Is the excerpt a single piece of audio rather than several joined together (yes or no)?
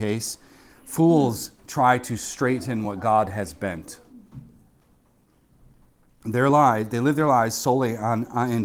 yes